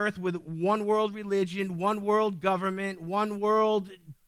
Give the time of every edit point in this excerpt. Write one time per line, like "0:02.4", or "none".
none

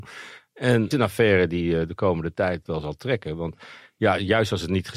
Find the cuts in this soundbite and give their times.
0:00.9
0:02.7

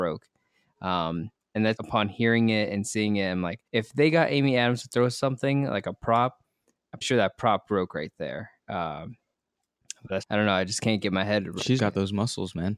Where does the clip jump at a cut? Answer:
0:01.8
0:03.7
0:07.0
0:08.6
0:10.2
0:11.8

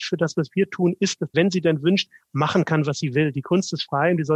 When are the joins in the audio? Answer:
0:01.3

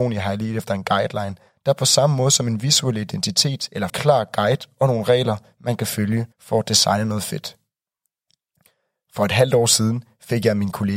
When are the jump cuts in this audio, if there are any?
0:02.6
0:03.9
0:06.3

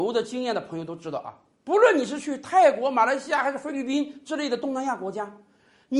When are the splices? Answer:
none

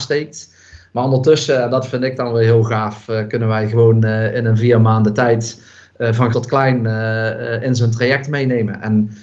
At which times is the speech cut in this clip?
0:06.3

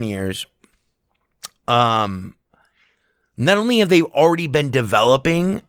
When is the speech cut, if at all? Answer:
none

